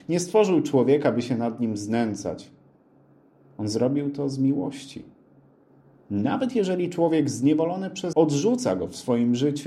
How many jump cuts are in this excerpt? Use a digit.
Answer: 1